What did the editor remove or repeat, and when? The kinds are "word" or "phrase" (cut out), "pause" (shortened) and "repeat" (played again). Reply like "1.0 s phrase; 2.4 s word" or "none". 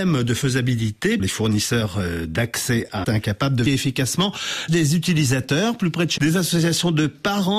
1.2 s word; 3.0 s word; 3.7 s word; 4.7 s word; 6.2 s word